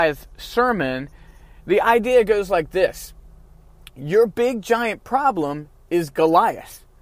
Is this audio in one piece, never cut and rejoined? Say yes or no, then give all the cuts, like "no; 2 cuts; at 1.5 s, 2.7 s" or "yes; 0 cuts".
yes; 0 cuts